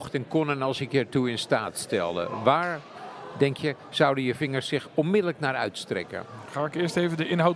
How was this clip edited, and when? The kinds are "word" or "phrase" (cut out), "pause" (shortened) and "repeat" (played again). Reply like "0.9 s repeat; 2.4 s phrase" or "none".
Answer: none